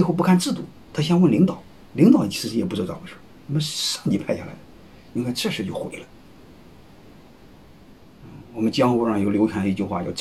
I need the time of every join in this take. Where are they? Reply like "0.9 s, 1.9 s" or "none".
1.9 s